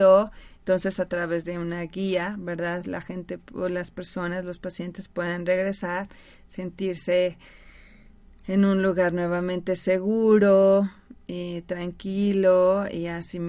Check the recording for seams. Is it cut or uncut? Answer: uncut